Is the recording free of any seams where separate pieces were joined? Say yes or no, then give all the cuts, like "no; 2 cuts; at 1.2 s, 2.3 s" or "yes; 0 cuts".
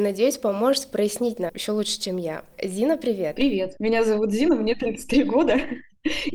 no; 1 cut; at 1.5 s